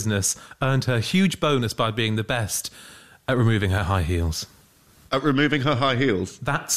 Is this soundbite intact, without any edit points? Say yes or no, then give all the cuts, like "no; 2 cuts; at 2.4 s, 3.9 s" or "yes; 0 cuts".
yes; 0 cuts